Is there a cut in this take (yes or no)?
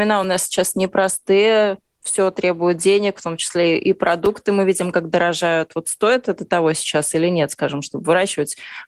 no